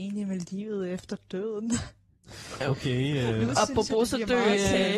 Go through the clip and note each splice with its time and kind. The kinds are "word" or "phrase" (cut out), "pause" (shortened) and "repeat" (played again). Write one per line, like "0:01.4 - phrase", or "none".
0:02.6 - word